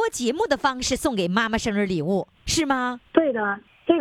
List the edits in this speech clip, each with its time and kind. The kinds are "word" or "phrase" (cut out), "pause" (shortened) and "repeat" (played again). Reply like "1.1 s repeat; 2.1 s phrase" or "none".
3.1 s pause